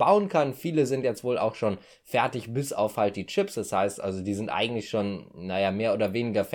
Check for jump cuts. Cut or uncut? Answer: uncut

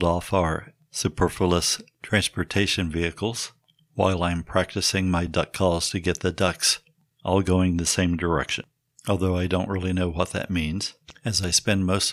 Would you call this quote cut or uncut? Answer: uncut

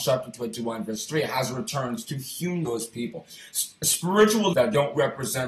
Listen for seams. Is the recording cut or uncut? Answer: cut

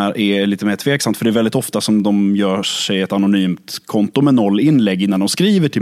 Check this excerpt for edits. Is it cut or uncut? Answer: uncut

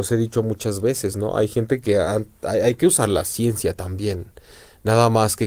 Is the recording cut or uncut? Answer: uncut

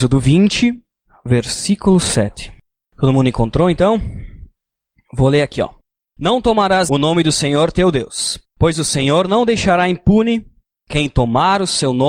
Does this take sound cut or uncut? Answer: cut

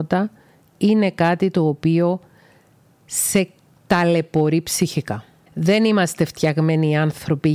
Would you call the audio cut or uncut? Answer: uncut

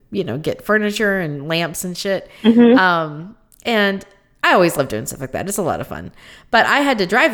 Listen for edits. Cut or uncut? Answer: uncut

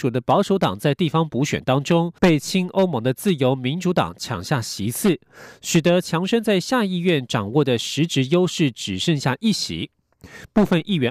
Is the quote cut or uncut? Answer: cut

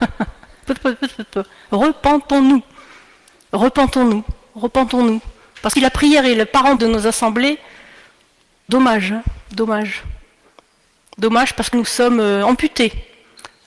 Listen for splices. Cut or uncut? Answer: cut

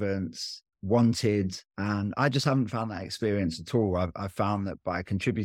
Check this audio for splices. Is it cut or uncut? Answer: cut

